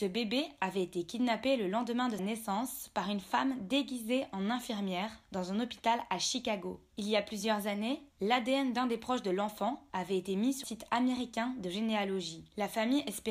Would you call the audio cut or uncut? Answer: cut